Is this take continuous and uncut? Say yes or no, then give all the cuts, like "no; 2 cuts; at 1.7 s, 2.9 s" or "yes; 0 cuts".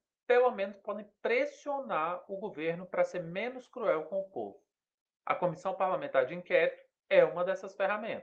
yes; 0 cuts